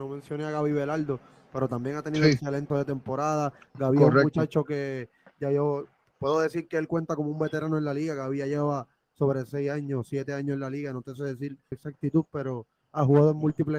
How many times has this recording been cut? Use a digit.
2